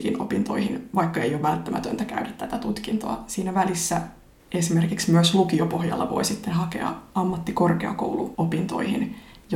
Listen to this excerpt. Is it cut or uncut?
uncut